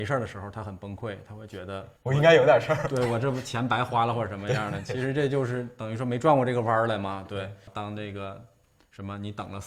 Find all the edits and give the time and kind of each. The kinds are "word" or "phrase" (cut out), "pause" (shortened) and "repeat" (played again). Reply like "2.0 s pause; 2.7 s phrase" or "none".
2.0 s pause